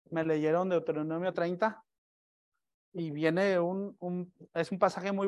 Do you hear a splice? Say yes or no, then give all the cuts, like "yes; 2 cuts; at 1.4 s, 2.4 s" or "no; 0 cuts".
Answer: no; 0 cuts